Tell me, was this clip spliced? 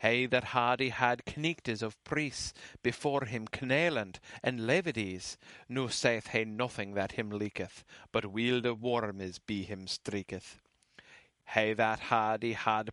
no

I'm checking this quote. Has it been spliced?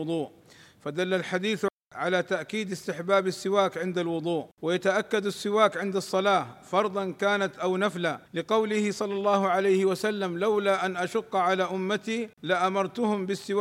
yes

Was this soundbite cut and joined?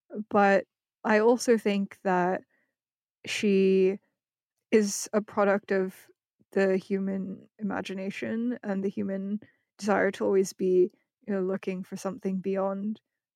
no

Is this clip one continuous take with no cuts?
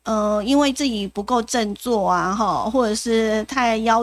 yes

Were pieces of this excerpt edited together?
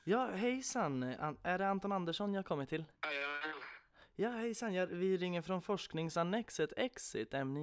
yes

